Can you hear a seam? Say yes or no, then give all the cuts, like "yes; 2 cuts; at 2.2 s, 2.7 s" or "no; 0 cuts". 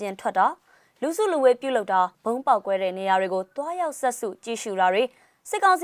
yes; 1 cut; at 2.1 s